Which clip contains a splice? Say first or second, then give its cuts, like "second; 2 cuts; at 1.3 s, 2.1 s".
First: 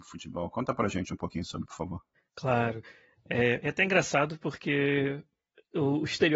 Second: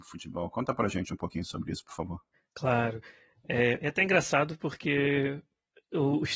first; 1 cut; at 1.7 s